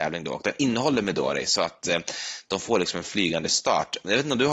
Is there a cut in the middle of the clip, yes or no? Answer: no